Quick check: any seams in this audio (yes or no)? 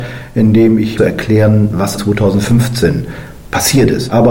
yes